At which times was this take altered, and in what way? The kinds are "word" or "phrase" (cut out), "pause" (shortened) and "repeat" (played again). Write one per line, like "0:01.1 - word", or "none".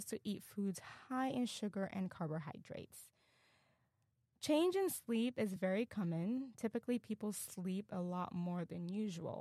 none